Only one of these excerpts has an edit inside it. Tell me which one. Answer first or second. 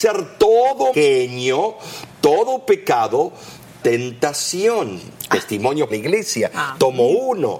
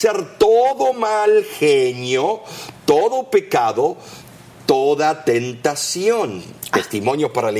first